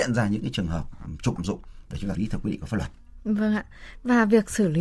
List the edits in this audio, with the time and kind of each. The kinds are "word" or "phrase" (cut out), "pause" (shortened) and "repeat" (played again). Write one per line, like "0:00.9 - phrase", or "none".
0:01.4 - word
0:02.1 - word